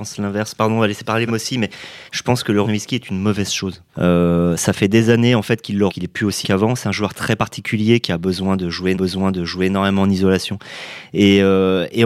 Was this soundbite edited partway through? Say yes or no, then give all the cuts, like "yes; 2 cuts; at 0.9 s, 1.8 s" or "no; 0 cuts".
yes; 7 cuts; at 1.3 s, 2.1 s, 2.6 s, 3.9 s, 5.9 s, 6.4 s, 8.9 s